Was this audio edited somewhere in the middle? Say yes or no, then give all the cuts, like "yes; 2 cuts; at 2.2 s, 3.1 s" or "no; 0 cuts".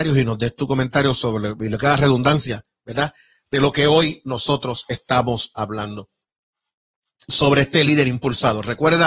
no; 0 cuts